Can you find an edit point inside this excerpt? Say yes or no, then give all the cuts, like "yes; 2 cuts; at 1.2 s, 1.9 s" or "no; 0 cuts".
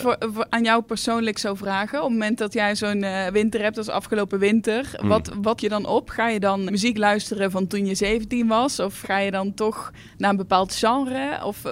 yes; 3 cuts; at 5.6 s, 6.7 s, 9.0 s